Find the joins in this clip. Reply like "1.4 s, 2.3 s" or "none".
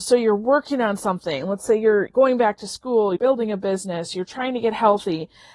2.1 s, 3.2 s